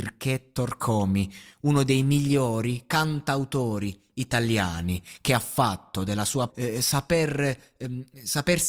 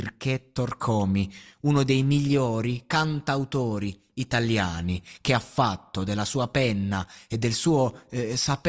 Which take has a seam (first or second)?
first